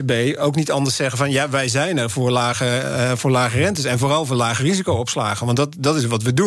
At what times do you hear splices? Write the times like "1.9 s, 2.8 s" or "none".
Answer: none